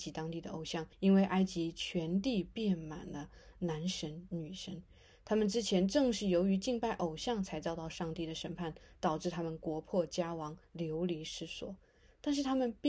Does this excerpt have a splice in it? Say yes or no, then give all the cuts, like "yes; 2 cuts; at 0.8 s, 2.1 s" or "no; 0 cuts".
yes; 1 cut; at 0.9 s